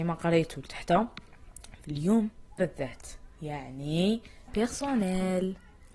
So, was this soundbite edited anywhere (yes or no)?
yes